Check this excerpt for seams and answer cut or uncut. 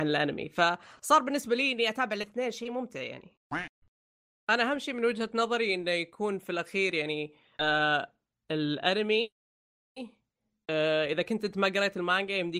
uncut